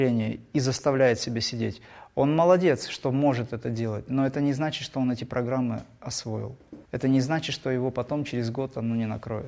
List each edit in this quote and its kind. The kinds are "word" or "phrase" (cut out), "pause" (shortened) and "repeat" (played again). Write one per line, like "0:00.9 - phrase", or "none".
0:06.8 - pause

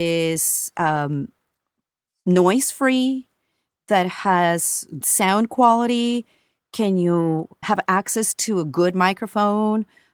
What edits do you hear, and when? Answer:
0:05.0 - word
0:07.6 - word

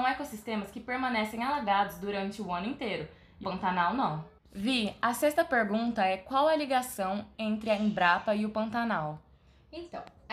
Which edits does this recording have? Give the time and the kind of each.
0:03.4 - word
0:04.4 - pause

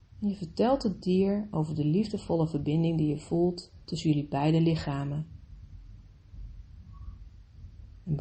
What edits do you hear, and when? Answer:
0:03.8 - pause

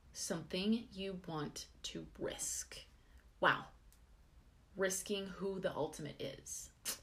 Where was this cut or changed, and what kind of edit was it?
none

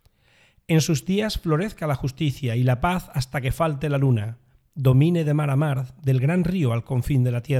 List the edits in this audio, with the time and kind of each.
none

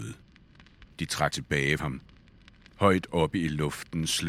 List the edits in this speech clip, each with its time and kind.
0:01.3 - word
0:01.8 - word

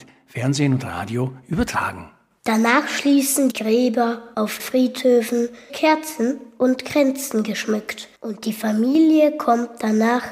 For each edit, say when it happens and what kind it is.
0:03.5 - phrase
0:04.6 - word
0:05.7 - phrase
0:08.2 - pause

